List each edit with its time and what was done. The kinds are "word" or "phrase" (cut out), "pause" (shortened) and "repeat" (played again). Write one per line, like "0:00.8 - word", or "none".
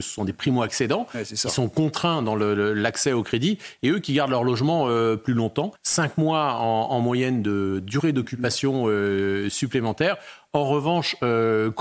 0:05.7 - pause